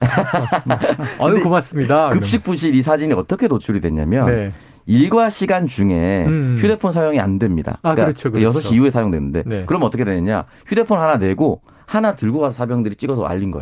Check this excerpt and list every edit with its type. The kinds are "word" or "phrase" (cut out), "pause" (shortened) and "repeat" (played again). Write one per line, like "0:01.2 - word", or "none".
none